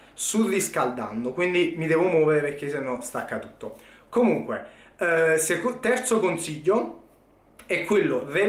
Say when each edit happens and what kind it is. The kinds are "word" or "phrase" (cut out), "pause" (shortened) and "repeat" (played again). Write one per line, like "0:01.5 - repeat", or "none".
none